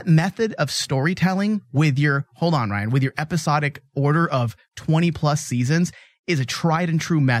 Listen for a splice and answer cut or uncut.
uncut